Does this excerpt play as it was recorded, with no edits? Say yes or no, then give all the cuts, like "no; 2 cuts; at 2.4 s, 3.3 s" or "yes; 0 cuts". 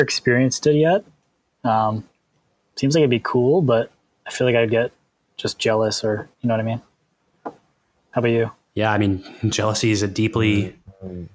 no; 1 cut; at 6.3 s